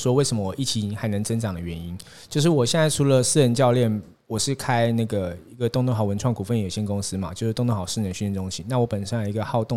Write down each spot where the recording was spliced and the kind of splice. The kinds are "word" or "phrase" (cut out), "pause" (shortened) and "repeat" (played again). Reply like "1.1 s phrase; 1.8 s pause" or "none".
none

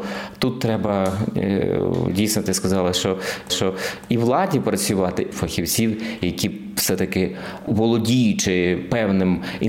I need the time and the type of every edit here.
3.5 s repeat; 5.3 s phrase

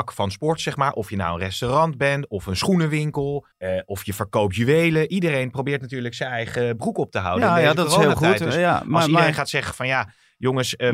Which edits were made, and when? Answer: 3.5 s pause

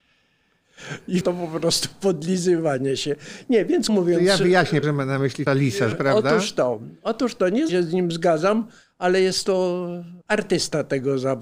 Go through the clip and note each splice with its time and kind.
1.2 s word; 3.9 s word; 4.8 s word; 5.5 s word; 5.9 s word; 7.7 s word; 10.2 s pause

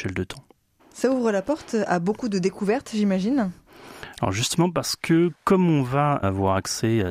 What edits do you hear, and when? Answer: 5.4 s pause

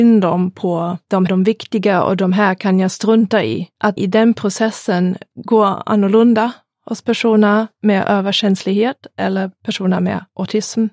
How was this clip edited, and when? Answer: 1.3 s word; 4.0 s word

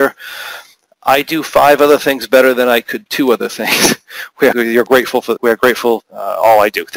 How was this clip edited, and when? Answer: 3.1 s word; 4.5 s word; 5.4 s word; 6.0 s word

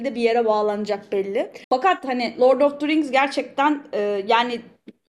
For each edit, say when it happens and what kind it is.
1.6 s pause

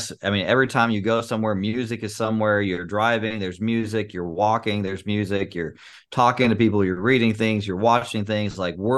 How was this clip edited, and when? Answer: none

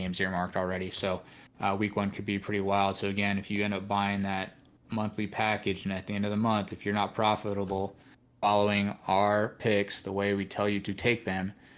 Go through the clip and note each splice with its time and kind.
none

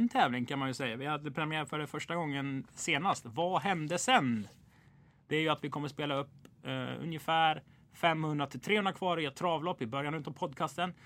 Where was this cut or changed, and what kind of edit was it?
none

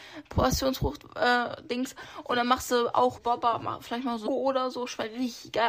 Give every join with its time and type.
3.2 s word; 4.3 s word

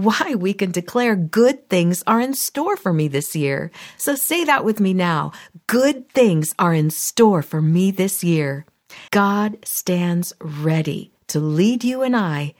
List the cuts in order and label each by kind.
9.1 s pause

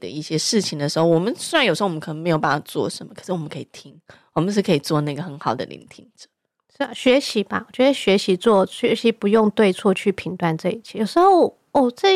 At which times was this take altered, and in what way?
none

